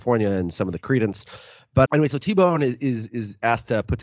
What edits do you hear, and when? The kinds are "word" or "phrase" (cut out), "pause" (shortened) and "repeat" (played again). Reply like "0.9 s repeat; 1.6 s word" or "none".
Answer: 1.9 s word